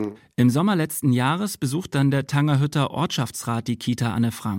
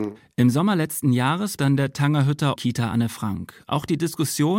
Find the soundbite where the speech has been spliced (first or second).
second